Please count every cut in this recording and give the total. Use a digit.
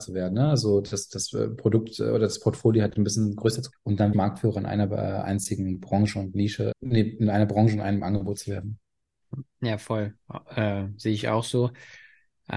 3